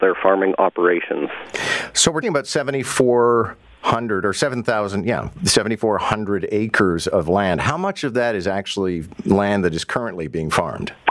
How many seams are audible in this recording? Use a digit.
1